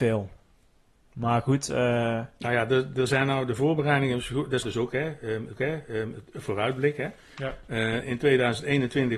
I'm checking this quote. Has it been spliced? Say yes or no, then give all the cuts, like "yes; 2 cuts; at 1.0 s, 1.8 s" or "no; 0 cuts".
yes; 2 cuts; at 4.6 s, 5.6 s